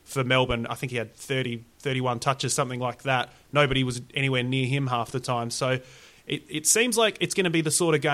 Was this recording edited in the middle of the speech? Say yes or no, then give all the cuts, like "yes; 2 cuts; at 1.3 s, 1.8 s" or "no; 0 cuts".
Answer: no; 0 cuts